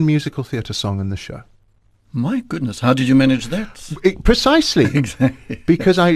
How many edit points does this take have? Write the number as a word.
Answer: zero